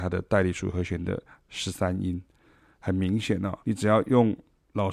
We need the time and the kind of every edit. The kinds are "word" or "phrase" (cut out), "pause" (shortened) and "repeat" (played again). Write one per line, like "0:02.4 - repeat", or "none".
0:03.6 - pause